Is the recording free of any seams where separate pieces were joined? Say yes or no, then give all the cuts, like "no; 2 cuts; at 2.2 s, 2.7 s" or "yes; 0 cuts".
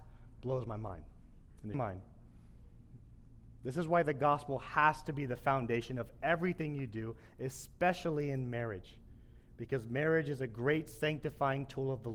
no; 1 cut; at 1.7 s